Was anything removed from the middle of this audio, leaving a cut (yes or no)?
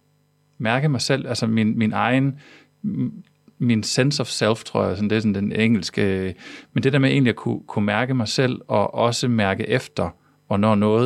no